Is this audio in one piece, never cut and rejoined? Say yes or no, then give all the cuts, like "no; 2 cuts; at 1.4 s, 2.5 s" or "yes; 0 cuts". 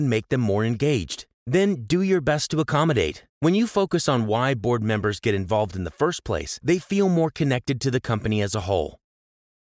no; 1 cut; at 3.3 s